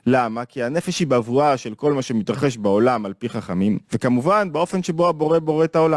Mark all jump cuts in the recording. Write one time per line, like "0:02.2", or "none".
0:03.8